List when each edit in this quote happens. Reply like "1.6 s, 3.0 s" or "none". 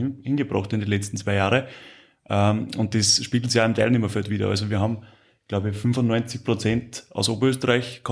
none